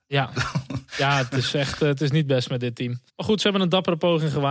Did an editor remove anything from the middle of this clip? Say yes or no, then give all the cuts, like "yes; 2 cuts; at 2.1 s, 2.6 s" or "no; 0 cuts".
yes; 1 cut; at 3.1 s